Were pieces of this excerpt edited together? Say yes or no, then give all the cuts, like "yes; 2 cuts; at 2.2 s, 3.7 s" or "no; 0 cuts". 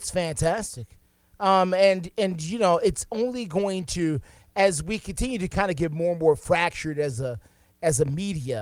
no; 0 cuts